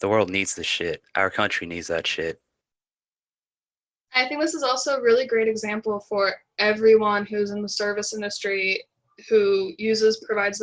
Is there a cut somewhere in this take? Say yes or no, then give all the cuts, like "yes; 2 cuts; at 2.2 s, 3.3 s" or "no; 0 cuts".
no; 0 cuts